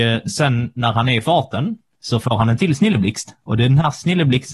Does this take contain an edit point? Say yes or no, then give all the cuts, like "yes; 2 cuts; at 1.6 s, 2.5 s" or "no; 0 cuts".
no; 0 cuts